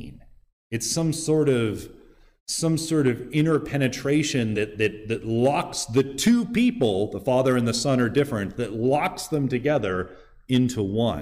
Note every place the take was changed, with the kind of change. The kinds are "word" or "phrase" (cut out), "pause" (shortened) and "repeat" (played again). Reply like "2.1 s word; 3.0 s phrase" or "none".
none